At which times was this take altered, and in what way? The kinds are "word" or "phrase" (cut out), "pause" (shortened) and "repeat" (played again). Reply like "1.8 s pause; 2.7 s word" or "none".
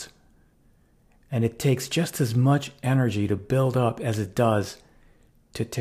none